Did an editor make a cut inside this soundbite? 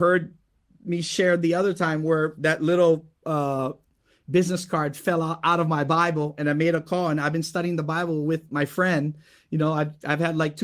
no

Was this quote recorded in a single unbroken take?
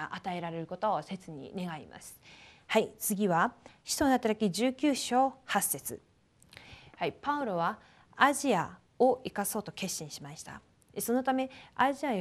yes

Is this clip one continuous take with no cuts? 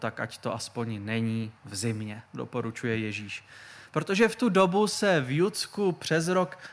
no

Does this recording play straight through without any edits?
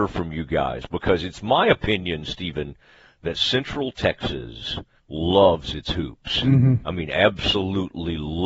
no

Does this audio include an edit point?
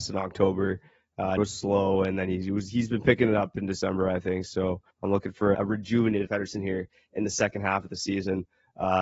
yes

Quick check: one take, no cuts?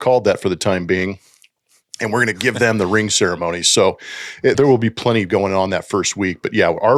no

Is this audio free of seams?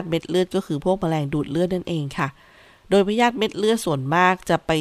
yes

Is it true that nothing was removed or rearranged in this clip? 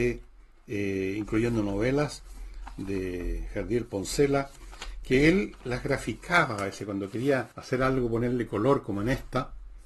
no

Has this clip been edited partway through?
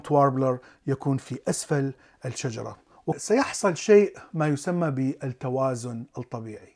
no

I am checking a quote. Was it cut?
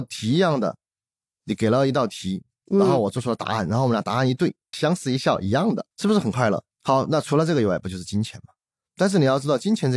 yes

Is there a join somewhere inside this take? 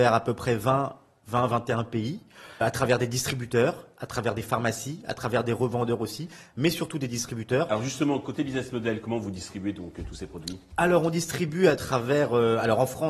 yes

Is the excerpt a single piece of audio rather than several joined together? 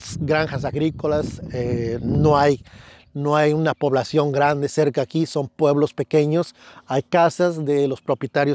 yes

